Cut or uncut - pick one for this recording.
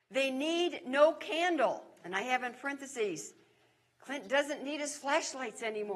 uncut